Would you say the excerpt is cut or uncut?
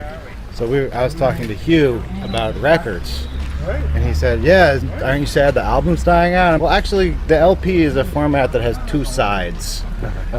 cut